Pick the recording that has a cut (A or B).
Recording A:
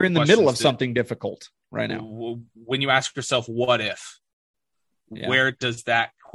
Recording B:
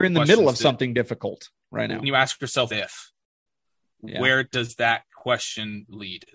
B